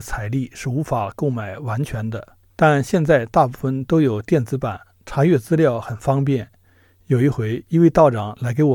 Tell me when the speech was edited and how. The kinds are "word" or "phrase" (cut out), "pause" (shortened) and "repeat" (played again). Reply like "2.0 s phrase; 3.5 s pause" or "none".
2.4 s pause